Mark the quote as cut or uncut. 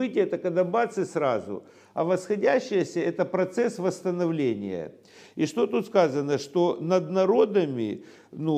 uncut